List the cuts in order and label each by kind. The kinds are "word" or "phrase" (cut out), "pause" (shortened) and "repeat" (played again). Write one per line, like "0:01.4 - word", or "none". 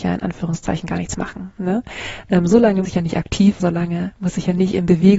0:02.8 - word
0:03.6 - word